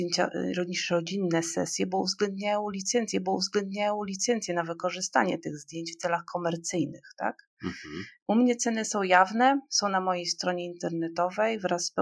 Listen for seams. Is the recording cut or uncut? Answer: cut